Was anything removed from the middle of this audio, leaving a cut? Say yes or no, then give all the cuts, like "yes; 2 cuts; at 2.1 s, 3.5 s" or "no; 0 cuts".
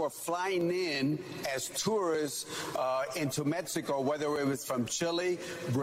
no; 0 cuts